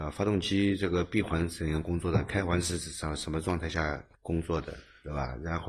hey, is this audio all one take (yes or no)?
no